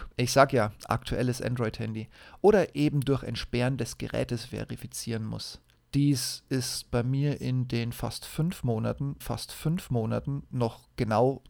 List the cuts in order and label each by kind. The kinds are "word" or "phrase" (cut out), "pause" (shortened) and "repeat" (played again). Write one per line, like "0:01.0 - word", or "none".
0:05.8 - pause
0:09.2 - repeat